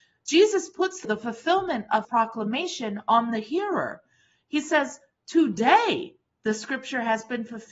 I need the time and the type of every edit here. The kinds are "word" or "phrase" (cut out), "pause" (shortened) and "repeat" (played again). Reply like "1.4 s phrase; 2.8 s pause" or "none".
1.0 s word; 2.0 s word